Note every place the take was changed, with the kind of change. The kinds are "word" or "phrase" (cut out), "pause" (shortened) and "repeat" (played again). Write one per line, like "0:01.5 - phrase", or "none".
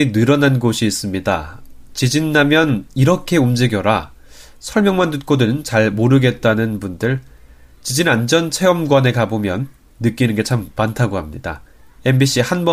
none